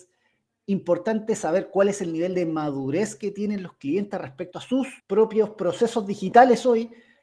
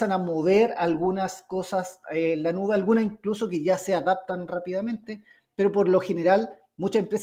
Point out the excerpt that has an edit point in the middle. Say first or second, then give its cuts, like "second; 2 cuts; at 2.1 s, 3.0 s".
first; 1 cut; at 5.0 s